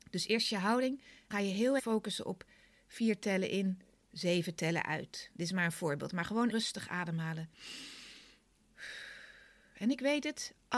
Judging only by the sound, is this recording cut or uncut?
cut